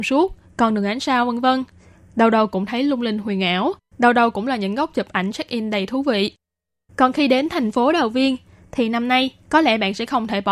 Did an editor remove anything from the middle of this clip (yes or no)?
no